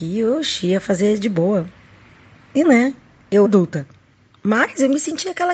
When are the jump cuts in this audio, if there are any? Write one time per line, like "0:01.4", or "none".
0:02.6
0:03.4